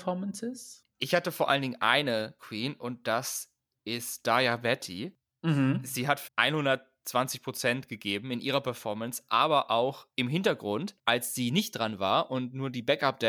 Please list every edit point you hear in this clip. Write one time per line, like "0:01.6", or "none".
0:02.4
0:06.3